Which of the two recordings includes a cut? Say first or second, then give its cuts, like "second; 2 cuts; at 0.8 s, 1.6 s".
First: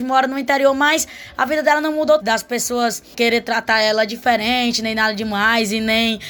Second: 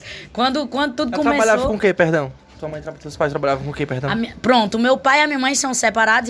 first; 2 cuts; at 2.2 s, 3.1 s